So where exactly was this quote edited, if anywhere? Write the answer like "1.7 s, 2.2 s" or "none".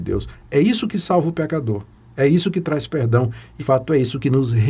3.6 s